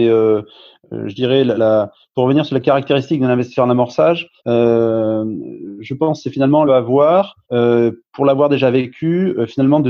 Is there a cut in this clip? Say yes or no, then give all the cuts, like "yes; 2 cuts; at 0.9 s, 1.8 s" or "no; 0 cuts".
yes; 4 cuts; at 1.6 s, 4.4 s, 6.7 s, 7.4 s